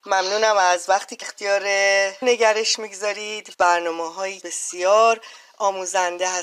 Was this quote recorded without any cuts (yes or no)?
no